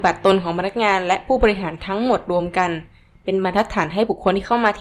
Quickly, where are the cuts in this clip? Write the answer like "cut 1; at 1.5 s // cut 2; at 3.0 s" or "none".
none